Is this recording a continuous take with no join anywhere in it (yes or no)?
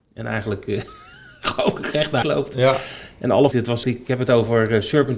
no